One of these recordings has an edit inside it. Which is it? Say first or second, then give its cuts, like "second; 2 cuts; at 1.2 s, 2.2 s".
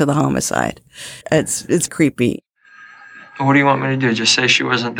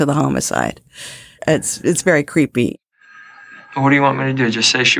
first; 2 cuts; at 1.2 s, 1.9 s